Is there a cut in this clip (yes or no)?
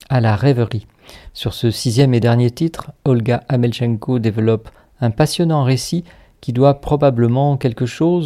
no